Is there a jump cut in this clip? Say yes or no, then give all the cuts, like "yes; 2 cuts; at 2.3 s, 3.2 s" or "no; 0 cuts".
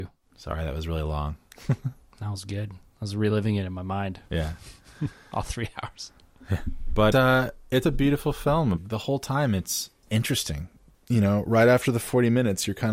yes; 2 cuts; at 7.1 s, 7.8 s